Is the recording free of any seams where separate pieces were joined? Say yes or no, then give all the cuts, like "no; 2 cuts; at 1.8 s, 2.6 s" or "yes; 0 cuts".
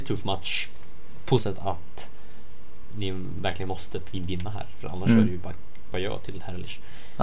no; 2 cuts; at 1.4 s, 5.9 s